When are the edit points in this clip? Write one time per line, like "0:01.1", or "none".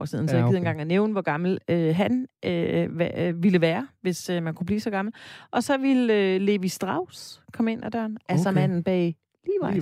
none